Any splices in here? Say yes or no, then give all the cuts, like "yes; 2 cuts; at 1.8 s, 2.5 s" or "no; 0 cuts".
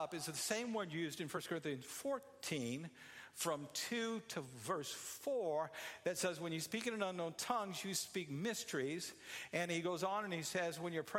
no; 0 cuts